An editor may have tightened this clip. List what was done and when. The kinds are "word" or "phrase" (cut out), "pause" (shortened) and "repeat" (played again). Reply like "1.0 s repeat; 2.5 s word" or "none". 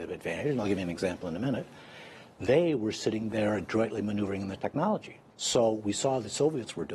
5.3 s pause